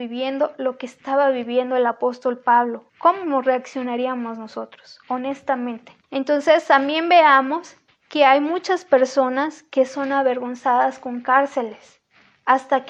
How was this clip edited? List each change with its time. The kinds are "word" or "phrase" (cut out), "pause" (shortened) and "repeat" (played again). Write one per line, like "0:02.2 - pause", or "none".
0:02.9 - pause
0:06.0 - pause
0:07.9 - pause